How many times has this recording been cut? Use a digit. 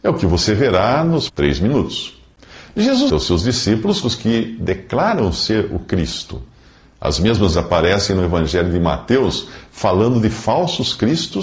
4